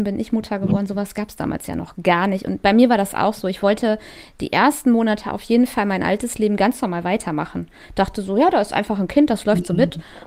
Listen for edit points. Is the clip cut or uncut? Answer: uncut